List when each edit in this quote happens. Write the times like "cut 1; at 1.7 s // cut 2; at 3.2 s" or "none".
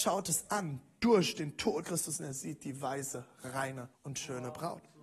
cut 1; at 1.8 s // cut 2; at 3.9 s